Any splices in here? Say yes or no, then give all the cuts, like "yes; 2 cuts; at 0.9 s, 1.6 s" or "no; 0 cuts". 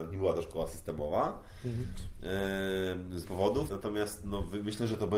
yes; 2 cuts; at 3.2 s, 3.7 s